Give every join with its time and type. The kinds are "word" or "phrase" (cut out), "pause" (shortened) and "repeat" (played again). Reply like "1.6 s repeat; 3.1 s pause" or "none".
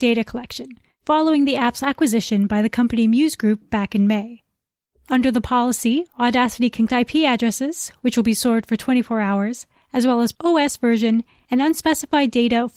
6.9 s word; 10.3 s word